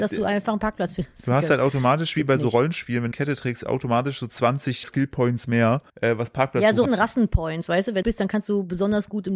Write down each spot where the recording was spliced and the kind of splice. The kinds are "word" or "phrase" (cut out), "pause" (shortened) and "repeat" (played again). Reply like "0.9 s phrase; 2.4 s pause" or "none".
3.1 s phrase; 4.8 s word; 5.9 s pause; 6.9 s word; 8.0 s phrase